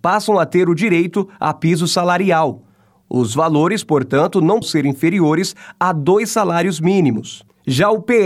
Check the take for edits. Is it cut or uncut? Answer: cut